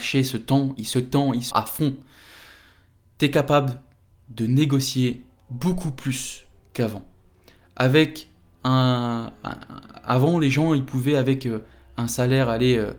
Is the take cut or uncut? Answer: cut